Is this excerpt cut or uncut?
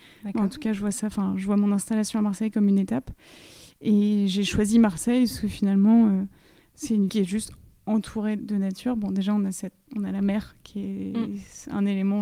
cut